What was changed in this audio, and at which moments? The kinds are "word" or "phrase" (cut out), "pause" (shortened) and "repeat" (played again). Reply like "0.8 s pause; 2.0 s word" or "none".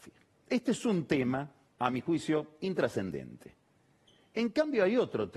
none